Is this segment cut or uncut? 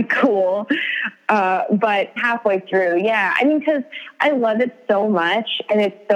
cut